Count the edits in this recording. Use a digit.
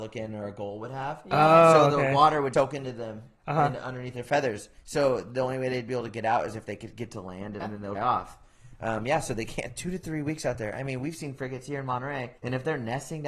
5